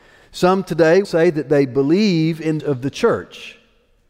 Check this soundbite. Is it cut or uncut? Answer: cut